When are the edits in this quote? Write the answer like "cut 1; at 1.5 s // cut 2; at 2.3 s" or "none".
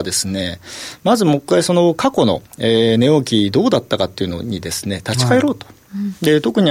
cut 1; at 2.5 s